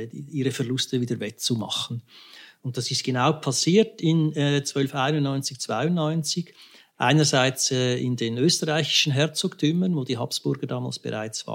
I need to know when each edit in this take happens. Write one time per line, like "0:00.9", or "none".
none